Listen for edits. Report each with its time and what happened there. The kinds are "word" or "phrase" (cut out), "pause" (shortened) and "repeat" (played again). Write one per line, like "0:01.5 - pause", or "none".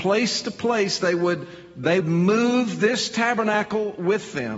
0:02.0 - word